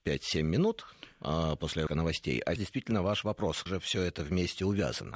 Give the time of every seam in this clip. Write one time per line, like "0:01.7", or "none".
0:01.9
0:02.6
0:03.7